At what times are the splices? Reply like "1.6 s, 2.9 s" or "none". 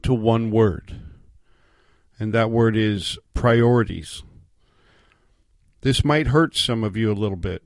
none